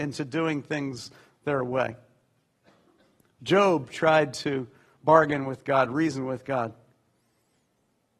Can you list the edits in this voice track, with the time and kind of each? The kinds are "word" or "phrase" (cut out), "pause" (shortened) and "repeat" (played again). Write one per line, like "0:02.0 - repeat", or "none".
none